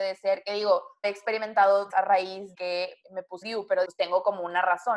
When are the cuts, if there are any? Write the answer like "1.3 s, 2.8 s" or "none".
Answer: 1.0 s, 1.9 s, 2.5 s, 3.0 s, 3.4 s, 3.8 s